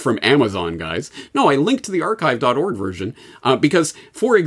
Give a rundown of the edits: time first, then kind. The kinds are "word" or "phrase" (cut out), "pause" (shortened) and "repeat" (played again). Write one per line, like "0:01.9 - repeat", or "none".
none